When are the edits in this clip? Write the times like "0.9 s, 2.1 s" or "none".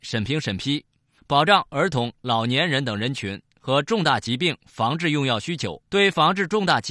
5.9 s